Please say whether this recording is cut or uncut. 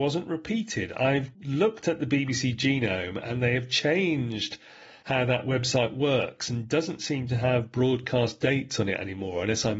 uncut